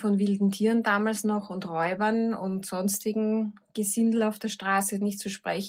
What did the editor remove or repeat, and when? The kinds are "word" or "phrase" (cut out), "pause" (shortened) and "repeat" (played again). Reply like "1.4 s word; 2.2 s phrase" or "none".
none